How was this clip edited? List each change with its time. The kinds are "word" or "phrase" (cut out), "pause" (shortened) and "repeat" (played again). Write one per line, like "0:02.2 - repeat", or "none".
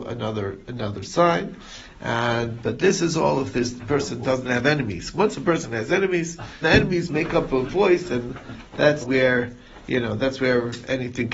0:06.6 - word
0:09.0 - word